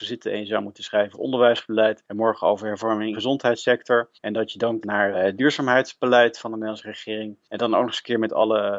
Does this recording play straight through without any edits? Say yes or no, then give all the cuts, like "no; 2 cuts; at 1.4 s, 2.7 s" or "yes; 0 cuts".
no; 6 cuts; at 1.1 s, 3.1 s, 4.1 s, 4.8 s, 5.1 s, 7.4 s